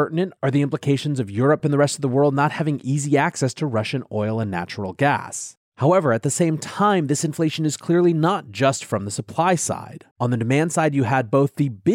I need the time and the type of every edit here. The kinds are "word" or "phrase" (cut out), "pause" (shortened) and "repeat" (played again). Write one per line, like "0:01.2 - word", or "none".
0:05.6 - pause
0:10.1 - pause